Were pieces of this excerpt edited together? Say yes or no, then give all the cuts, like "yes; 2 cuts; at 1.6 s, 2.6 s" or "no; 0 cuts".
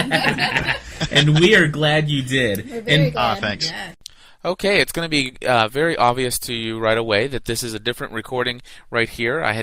no; 0 cuts